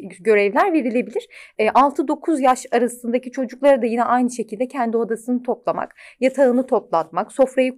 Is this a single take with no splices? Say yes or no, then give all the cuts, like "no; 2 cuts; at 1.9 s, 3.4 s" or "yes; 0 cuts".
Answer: yes; 0 cuts